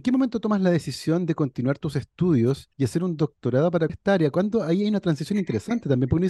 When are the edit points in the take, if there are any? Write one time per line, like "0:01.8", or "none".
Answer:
0:02.7
0:03.9